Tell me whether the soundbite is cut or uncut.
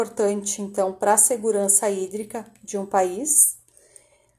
uncut